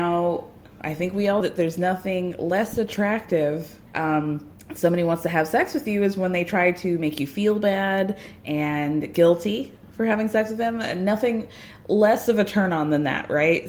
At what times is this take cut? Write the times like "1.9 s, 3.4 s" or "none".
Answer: 1.4 s, 3.9 s, 4.6 s